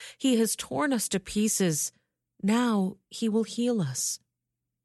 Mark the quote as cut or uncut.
uncut